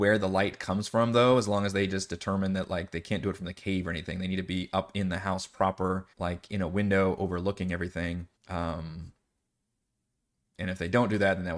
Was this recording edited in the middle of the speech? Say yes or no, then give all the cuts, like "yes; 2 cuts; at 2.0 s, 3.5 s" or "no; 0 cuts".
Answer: yes; 2 cuts; at 6.1 s, 8.4 s